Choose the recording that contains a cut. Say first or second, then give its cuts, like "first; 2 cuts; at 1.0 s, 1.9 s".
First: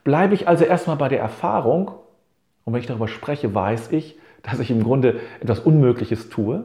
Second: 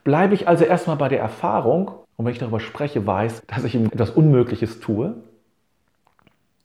second; 3 cuts; at 2.0 s, 3.4 s, 3.9 s